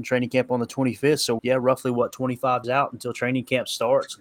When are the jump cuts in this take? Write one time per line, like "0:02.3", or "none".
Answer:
0:01.4
0:02.6